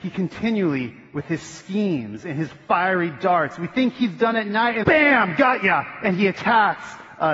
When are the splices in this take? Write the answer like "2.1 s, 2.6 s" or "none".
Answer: 4.8 s